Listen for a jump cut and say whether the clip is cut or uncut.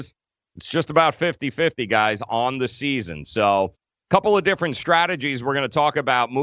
uncut